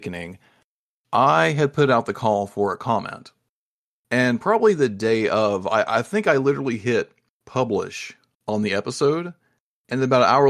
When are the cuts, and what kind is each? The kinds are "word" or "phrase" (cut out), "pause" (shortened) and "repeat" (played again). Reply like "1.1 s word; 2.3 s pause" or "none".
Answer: none